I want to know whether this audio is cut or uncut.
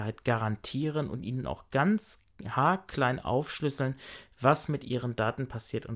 uncut